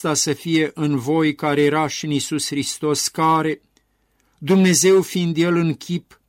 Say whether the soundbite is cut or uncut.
uncut